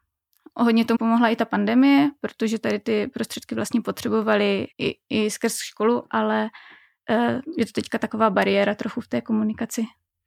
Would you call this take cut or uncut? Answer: cut